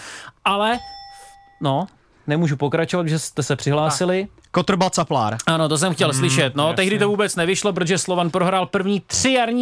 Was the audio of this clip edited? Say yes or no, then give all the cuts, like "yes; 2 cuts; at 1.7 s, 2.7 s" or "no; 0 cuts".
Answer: no; 0 cuts